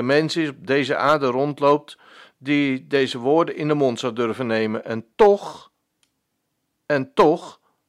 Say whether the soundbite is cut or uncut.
uncut